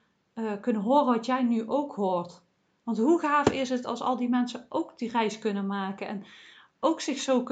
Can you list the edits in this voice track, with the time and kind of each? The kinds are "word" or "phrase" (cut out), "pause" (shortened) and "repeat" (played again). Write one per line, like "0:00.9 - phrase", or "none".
none